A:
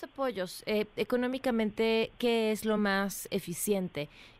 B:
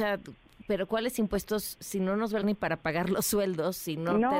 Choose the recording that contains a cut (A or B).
B